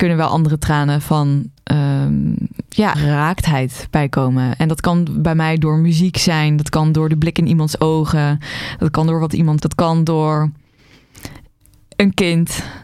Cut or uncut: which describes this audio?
cut